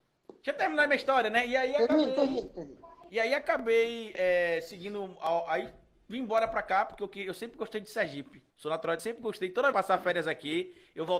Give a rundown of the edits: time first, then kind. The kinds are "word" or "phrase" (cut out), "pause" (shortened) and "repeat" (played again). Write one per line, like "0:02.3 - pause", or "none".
0:08.5 - pause
0:09.0 - word
0:09.7 - phrase

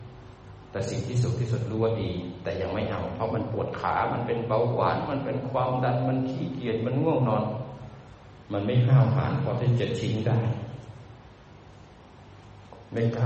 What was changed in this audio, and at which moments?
0:08.4 - pause

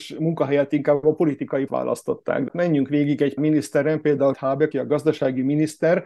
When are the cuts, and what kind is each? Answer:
0:01.7 - word
0:02.5 - word
0:03.4 - word
0:04.3 - word
0:04.7 - word

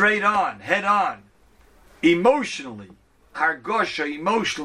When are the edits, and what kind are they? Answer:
0:03.3 - word

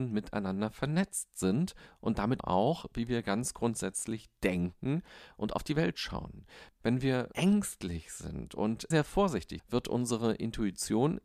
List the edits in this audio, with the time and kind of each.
0:02.4 - word
0:07.3 - word
0:08.9 - word
0:09.6 - word

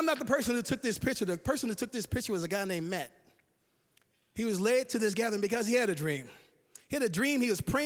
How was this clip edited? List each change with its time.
none

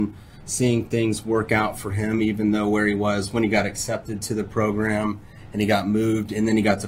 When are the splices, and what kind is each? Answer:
none

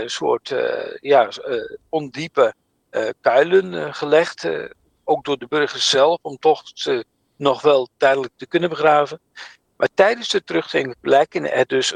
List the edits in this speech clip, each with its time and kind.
none

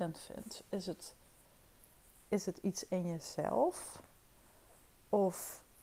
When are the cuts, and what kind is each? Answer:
none

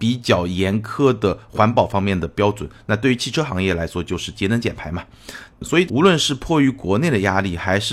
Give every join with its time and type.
0:05.5 - pause

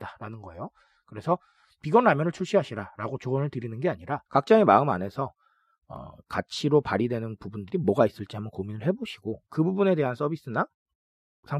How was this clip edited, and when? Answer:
0:04.3 - pause

